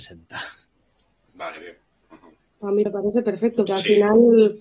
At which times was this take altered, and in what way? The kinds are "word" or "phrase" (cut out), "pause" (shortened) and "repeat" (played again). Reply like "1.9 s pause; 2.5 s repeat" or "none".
2.9 s word; 3.7 s word